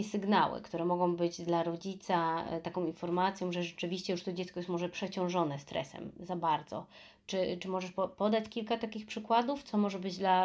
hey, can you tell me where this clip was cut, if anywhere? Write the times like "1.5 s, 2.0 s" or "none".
none